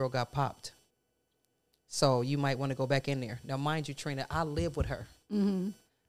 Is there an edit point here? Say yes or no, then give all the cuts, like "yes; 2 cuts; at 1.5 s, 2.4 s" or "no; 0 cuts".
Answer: no; 0 cuts